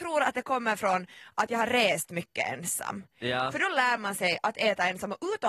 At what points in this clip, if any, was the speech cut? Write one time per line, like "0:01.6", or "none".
none